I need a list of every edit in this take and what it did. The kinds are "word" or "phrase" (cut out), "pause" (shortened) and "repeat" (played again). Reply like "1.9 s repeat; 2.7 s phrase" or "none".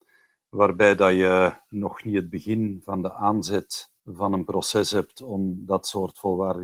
4.0 s pause